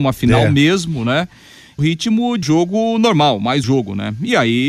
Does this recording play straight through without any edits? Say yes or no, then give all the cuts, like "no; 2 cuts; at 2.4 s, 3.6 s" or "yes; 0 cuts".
no; 3 cuts; at 1.8 s, 2.4 s, 3.6 s